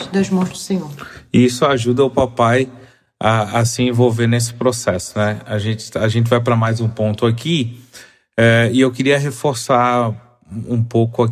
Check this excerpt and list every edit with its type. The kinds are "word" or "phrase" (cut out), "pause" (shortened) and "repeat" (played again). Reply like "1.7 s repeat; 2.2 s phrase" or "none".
none